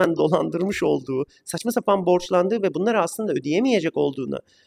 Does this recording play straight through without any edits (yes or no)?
yes